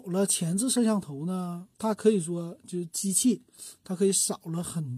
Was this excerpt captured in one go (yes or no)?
no